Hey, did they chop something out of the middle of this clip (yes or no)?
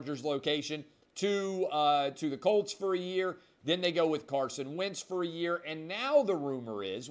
no